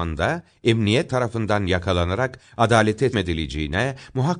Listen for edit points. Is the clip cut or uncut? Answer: cut